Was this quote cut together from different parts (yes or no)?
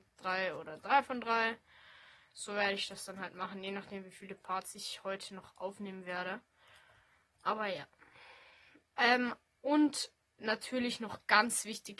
no